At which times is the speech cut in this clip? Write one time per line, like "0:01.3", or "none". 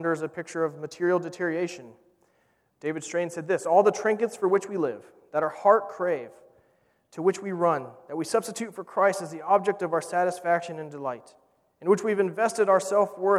none